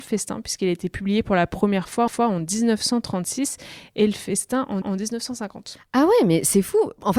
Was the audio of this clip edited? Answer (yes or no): yes